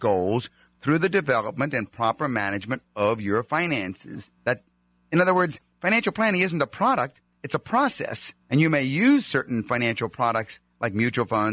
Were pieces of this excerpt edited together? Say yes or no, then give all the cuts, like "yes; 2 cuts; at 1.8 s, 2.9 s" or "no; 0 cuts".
yes; 2 cuts; at 4.4 s, 8.4 s